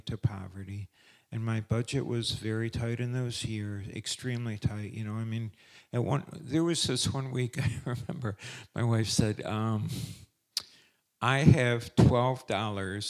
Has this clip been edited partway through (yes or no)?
no